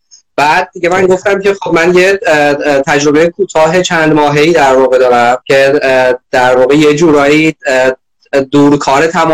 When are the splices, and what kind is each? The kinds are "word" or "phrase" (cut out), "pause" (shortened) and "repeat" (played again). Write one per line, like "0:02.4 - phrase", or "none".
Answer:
0:05.4 - pause